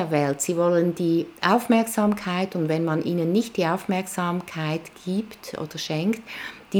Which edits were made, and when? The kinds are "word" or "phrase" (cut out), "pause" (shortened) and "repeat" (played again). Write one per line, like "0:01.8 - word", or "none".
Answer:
none